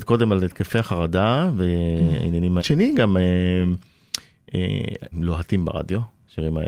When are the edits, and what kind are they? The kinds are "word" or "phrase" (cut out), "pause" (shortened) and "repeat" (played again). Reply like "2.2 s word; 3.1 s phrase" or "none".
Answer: 2.6 s phrase; 5.1 s word